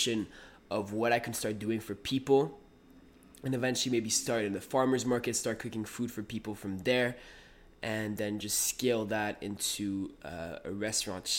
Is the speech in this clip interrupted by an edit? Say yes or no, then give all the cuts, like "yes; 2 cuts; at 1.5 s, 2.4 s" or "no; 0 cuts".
no; 0 cuts